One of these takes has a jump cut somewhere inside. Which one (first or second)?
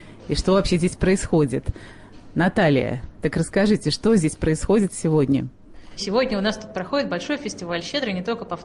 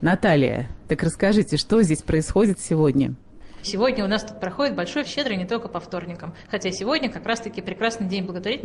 second